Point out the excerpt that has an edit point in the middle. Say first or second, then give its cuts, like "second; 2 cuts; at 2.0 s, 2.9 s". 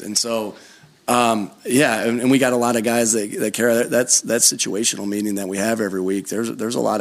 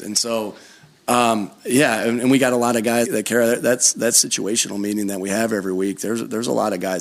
second; 1 cut; at 3.0 s